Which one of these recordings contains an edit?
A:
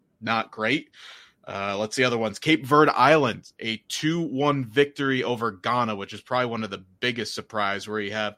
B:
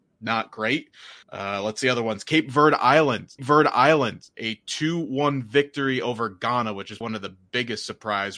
B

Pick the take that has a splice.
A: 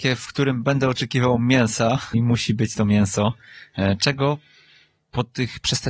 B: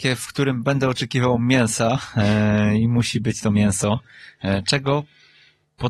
A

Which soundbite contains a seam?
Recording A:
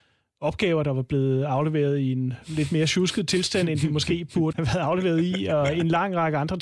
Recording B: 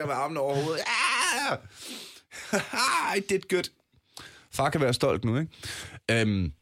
A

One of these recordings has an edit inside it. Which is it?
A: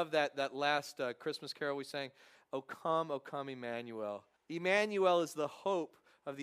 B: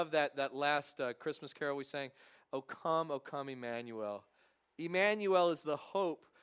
A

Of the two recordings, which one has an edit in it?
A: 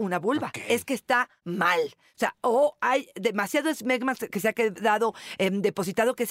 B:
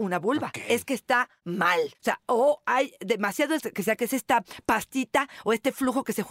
B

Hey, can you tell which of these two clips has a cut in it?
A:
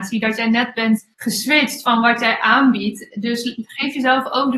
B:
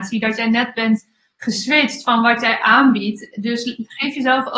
A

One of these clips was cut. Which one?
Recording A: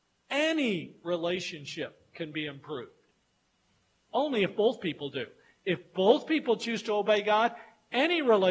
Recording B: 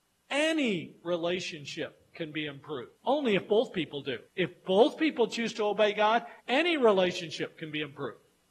B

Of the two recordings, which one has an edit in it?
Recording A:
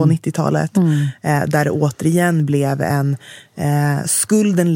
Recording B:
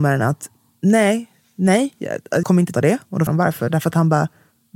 B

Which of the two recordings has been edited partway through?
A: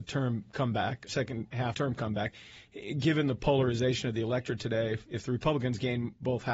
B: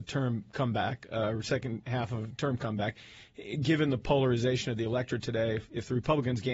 A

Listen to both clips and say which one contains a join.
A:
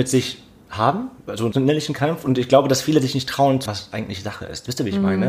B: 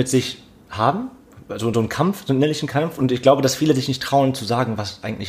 A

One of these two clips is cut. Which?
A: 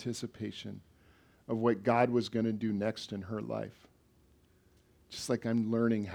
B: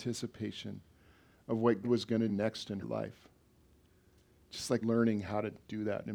B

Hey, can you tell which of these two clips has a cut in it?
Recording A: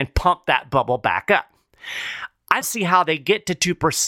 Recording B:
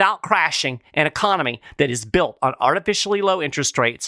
A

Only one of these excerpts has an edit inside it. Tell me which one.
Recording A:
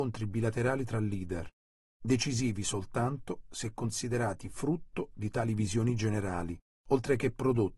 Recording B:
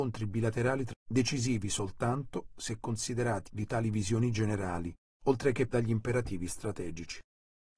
B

